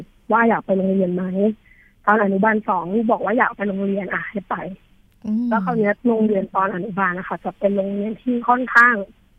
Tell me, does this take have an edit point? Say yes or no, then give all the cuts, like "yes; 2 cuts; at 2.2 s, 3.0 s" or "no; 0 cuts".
no; 0 cuts